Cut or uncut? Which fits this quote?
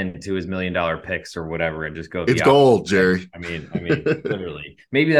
uncut